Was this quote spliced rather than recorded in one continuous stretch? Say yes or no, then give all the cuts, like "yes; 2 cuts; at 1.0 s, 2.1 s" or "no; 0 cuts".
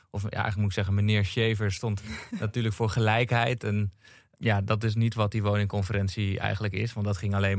no; 0 cuts